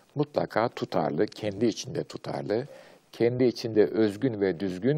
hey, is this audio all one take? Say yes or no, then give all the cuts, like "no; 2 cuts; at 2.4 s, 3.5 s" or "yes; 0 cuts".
yes; 0 cuts